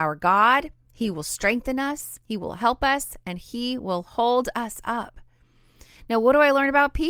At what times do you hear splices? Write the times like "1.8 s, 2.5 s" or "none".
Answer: 2.2 s